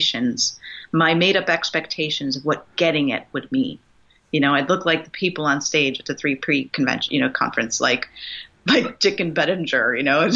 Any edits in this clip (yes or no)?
no